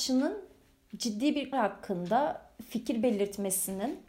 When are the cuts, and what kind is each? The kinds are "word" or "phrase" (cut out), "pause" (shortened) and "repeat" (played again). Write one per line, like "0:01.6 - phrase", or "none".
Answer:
0:01.5 - word